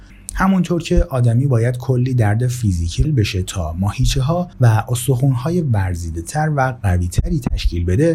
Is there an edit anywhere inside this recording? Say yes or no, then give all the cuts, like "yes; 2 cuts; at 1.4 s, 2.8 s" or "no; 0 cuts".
yes; 2 cuts; at 3.0 s, 4.5 s